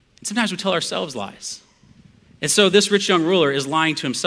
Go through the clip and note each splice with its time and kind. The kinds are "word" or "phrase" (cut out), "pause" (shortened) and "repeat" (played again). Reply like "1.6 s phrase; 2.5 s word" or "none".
none